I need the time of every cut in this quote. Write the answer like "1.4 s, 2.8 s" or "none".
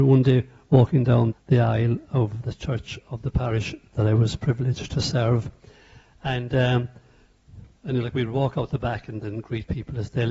1.3 s

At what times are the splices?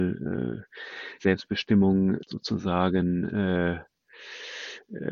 1.2 s, 2.2 s

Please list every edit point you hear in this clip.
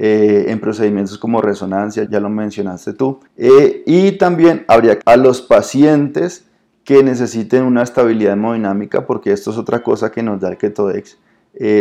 2.1 s, 3.3 s, 5.0 s

